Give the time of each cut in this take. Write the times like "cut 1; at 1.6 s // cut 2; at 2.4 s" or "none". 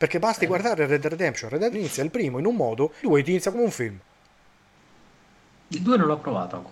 cut 1; at 1.0 s // cut 2; at 1.7 s // cut 3; at 3.0 s // cut 4; at 3.5 s